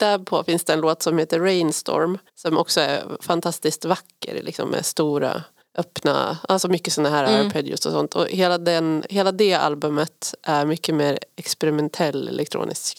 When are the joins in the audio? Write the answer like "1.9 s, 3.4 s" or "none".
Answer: 2.3 s, 5.6 s